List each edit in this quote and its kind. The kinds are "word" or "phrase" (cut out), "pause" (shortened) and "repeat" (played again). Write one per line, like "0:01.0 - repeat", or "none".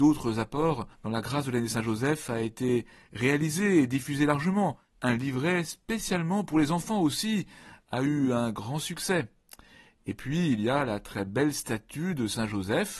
0:00.9 - pause
0:04.9 - pause